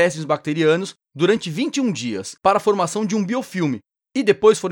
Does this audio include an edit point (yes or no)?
yes